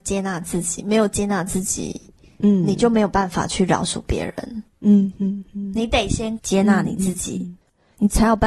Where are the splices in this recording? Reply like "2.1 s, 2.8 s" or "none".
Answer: none